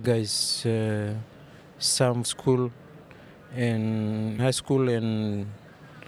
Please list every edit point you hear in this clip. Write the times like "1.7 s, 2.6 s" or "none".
2.2 s, 4.4 s